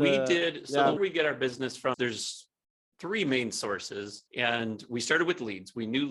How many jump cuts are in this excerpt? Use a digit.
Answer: 3